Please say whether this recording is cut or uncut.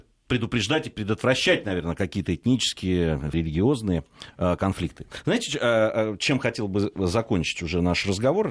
cut